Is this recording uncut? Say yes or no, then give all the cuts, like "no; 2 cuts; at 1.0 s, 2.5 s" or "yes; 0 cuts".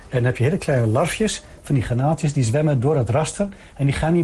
yes; 0 cuts